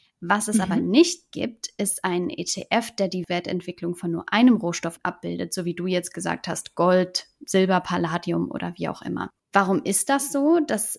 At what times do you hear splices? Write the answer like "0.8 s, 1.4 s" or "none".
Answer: 9.4 s

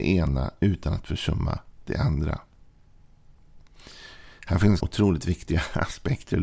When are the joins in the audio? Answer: 4.8 s

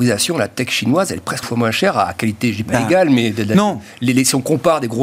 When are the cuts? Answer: 1.4 s

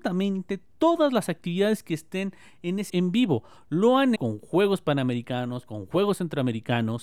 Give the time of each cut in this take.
2.9 s, 4.2 s

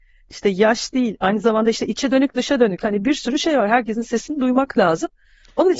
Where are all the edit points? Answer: none

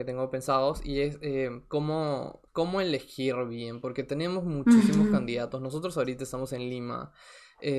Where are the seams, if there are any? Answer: 2.5 s

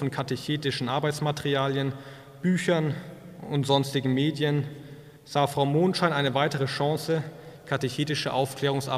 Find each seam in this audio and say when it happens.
5.2 s

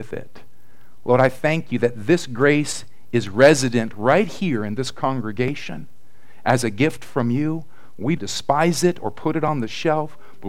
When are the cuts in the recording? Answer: 8.2 s

